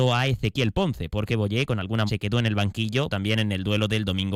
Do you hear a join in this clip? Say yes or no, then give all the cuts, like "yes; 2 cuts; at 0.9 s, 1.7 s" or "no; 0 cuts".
yes; 2 cuts; at 2.1 s, 3.1 s